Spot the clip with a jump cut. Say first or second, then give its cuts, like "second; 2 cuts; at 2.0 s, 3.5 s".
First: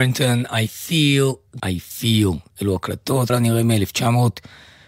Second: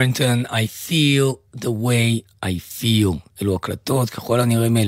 first; 2 cuts; at 1.6 s, 3.3 s